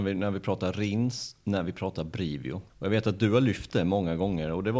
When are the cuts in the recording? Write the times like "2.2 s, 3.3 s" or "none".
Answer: 2.7 s